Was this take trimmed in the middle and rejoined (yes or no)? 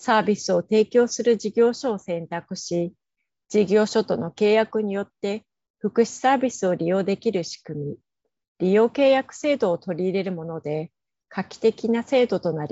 no